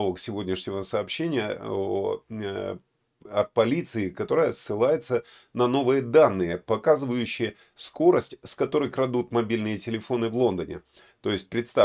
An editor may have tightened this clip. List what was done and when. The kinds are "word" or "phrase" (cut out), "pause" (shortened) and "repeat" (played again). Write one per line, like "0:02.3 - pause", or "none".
none